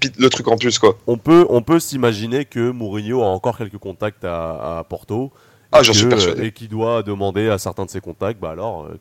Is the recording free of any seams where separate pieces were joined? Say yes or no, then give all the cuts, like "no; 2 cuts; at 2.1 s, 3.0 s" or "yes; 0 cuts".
yes; 0 cuts